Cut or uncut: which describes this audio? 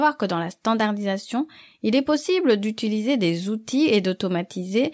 uncut